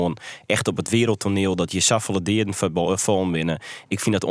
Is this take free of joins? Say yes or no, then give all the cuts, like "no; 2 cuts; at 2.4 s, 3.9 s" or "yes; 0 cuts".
yes; 0 cuts